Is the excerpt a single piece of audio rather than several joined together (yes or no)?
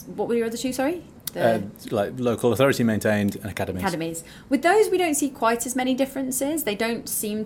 yes